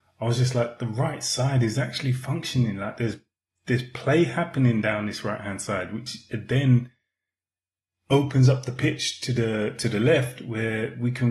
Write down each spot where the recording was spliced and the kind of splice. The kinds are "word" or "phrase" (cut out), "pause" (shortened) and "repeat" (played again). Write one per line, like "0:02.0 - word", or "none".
none

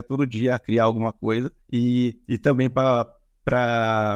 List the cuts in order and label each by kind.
0:01.6 - pause

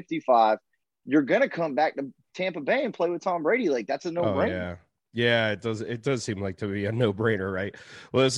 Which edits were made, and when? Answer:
none

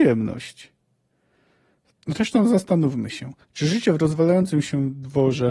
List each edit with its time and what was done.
0:03.4 - pause

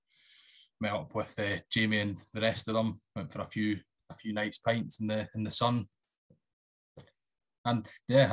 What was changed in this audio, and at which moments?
0:04.0 - pause

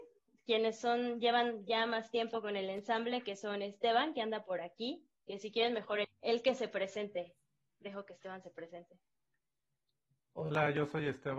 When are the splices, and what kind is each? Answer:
0:06.0 - word

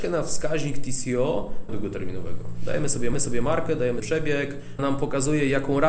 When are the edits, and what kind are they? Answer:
0:01.7 - phrase
0:03.1 - repeat
0:04.0 - word
0:04.8 - word

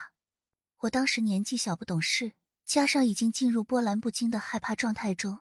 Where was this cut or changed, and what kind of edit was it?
0:02.5 - pause

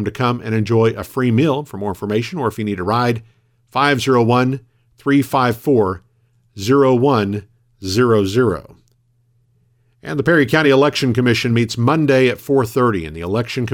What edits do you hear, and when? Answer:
none

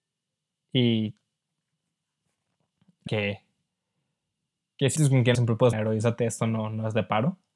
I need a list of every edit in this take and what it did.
0:03.1 - word
0:05.0 - word
0:05.3 - word
0:05.7 - phrase

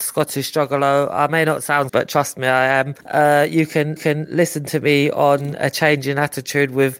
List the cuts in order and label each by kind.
0:01.9 - word
0:03.0 - pause
0:04.0 - repeat

